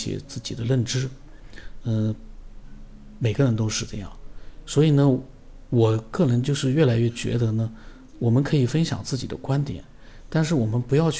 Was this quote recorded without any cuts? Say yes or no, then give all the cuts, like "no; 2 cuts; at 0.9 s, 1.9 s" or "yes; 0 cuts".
yes; 0 cuts